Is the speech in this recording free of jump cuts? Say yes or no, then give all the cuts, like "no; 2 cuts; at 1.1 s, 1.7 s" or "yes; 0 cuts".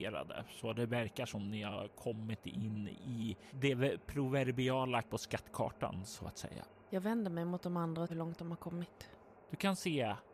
no; 2 cuts; at 5.0 s, 8.1 s